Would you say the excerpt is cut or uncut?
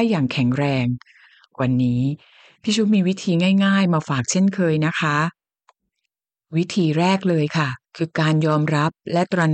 cut